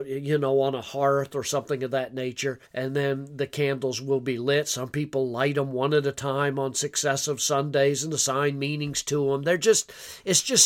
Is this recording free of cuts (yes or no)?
no